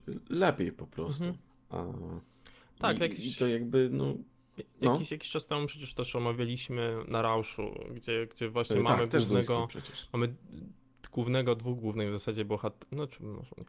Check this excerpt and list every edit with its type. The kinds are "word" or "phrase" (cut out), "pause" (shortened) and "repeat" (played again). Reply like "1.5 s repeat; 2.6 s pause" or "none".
1.5 s pause